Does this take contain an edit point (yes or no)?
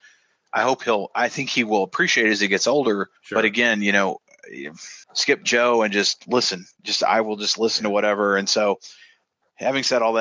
yes